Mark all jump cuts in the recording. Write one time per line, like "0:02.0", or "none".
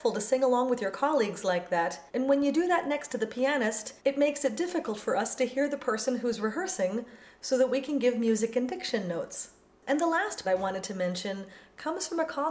0:02.1
0:04.0
0:09.7
0:10.4